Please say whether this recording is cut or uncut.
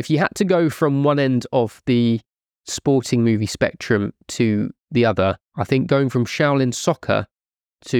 uncut